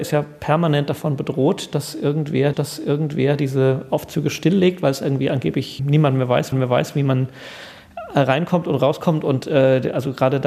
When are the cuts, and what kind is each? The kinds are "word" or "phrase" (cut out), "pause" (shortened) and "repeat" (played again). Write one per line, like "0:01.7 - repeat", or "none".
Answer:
0:02.5 - repeat
0:05.8 - word
0:06.5 - repeat
0:09.4 - word